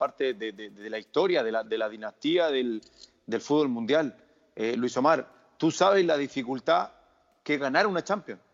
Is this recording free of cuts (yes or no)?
yes